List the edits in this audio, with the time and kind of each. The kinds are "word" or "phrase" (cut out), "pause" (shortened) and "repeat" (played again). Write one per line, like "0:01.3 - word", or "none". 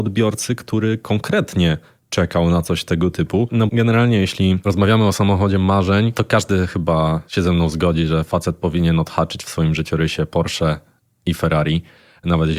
0:03.7 - word